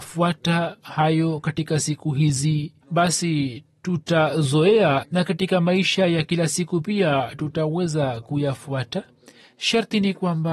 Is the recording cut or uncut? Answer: cut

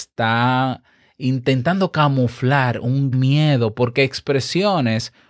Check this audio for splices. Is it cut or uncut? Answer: cut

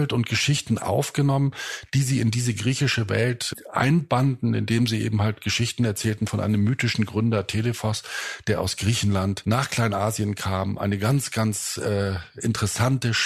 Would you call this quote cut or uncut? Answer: uncut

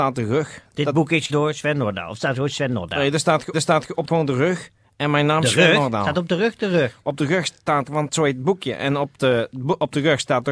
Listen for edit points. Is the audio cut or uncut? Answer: cut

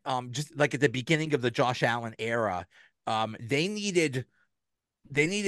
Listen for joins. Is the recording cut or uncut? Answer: uncut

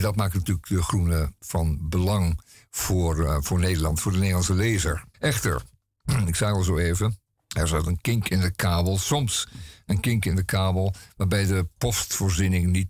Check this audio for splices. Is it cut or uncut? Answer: cut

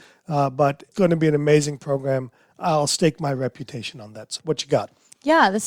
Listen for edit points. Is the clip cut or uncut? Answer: cut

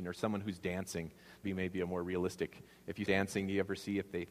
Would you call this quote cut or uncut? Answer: cut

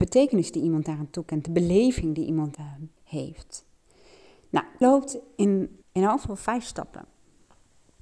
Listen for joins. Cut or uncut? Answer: cut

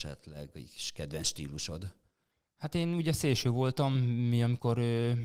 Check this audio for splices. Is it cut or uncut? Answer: uncut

